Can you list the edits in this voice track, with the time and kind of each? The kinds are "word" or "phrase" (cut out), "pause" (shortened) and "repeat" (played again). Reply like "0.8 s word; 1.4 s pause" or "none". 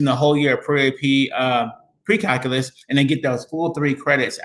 none